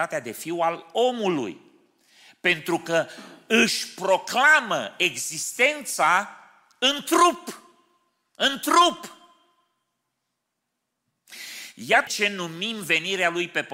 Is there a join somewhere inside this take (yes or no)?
yes